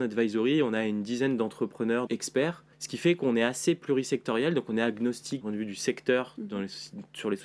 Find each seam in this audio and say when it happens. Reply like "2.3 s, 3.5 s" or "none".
2.1 s, 2.7 s, 5.4 s